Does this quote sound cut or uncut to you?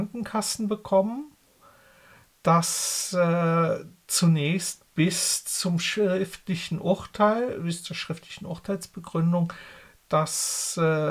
uncut